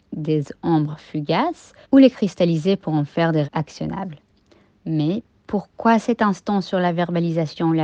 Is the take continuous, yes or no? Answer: no